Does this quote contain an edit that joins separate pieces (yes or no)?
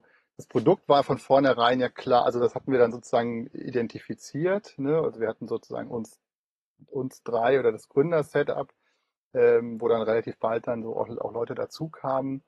no